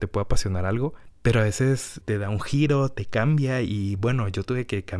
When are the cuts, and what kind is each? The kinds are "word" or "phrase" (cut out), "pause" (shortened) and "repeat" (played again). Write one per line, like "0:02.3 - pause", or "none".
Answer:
0:02.0 - phrase